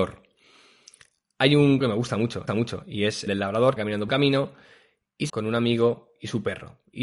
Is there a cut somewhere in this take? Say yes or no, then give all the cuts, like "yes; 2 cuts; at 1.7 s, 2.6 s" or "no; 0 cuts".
yes; 6 cuts; at 1.8 s, 2.5 s, 3.3 s, 3.8 s, 4.1 s, 5.3 s